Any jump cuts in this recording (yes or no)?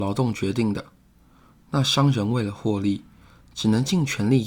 no